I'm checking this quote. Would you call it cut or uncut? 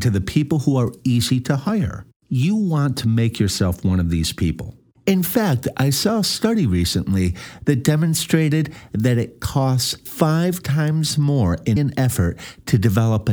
cut